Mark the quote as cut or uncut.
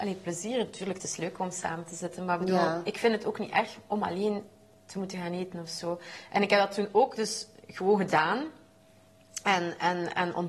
uncut